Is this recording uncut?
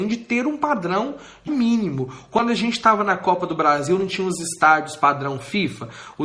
no; 1 cut; at 1.5 s

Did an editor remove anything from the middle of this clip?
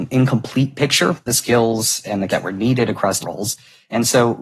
yes; 3 cuts; at 1.3 s, 2.3 s, 3.2 s

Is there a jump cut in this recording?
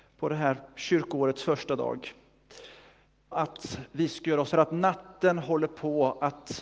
yes; 2 cuts; at 3.3 s, 4.5 s

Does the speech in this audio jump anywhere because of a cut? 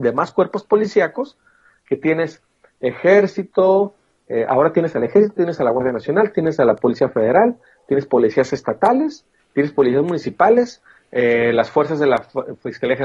no; 0 cuts

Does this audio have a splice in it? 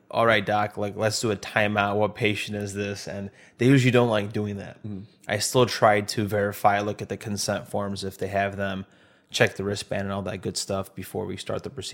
no; 0 cuts

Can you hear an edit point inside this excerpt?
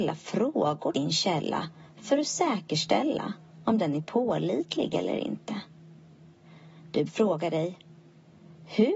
yes; 2 cuts; at 0.9 s, 7.1 s

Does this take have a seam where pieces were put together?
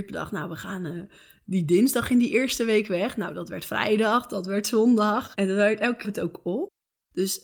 yes; 1 cut; at 6.0 s

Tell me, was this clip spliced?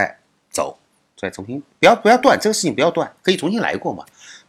yes; 2 cuts; at 0.9 s, 3.2 s

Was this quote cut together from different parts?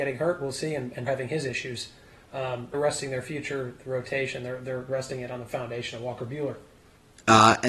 yes; 2 cuts; at 1.1 s, 2.7 s

